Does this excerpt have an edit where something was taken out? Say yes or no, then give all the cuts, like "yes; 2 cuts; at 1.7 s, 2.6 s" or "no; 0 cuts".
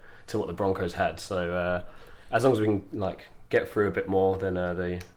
no; 0 cuts